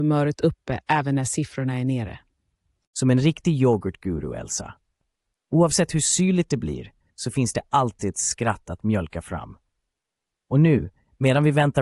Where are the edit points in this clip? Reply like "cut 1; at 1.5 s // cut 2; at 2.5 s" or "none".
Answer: none